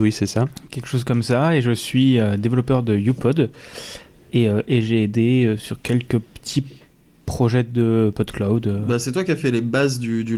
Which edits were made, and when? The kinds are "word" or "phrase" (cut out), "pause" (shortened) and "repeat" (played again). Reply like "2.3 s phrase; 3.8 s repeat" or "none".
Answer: none